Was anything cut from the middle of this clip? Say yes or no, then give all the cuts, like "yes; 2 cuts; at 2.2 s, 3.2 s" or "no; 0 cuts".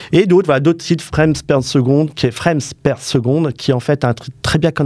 no; 0 cuts